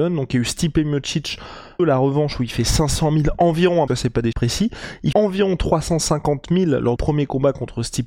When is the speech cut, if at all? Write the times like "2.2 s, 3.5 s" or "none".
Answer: 1.8 s, 3.9 s, 4.3 s, 5.1 s, 7.0 s